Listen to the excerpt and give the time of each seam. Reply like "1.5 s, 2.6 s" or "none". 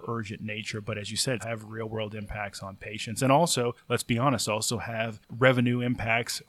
1.4 s